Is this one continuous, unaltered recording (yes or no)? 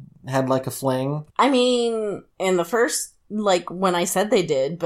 no